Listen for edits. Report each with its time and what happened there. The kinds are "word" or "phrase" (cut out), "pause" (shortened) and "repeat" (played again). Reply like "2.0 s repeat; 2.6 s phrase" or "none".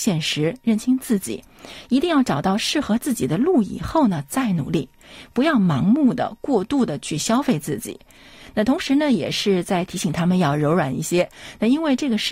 none